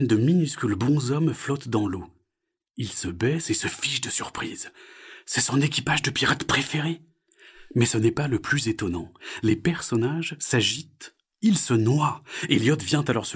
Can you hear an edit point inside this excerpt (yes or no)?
no